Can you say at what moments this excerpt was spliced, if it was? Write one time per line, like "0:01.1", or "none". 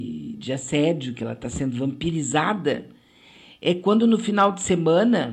none